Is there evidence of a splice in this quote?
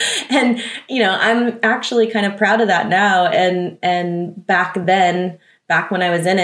no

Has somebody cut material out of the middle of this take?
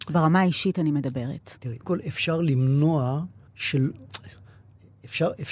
yes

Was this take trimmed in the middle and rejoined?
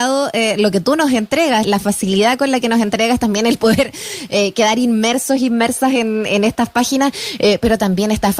yes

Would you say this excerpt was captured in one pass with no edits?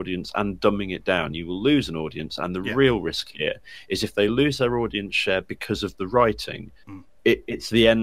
yes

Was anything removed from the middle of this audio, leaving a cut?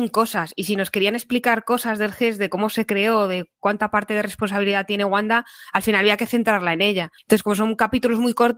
yes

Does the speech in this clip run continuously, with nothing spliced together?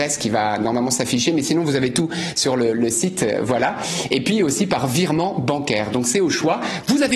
yes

